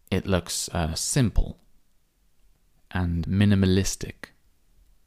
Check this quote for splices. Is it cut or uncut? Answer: cut